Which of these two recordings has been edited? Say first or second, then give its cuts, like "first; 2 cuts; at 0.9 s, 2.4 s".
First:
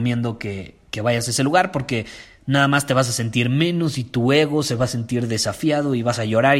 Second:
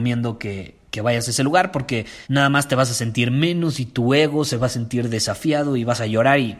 second; 1 cut; at 2.3 s